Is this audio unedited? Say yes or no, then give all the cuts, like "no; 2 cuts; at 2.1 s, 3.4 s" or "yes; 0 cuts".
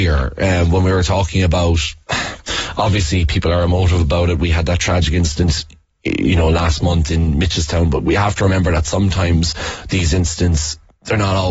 yes; 0 cuts